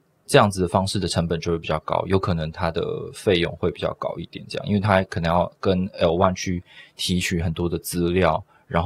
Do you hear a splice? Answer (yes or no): no